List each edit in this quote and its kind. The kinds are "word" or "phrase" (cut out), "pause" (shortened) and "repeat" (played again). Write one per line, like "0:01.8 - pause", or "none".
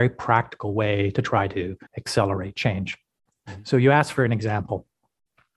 0:01.9 - pause